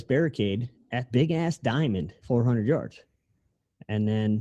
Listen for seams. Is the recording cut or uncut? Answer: cut